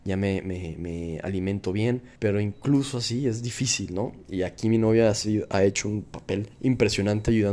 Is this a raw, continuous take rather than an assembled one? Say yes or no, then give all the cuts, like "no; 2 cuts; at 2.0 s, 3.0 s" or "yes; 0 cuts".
no; 2 cuts; at 2.2 s, 6.5 s